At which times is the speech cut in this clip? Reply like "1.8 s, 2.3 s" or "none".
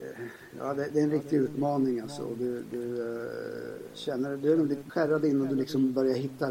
4.9 s